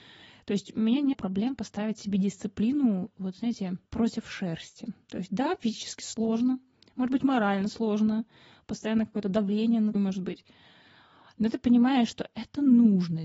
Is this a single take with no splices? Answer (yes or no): no